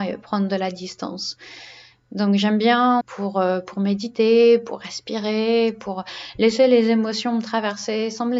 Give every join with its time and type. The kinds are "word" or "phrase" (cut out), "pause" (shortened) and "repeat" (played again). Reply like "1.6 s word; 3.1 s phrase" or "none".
3.0 s phrase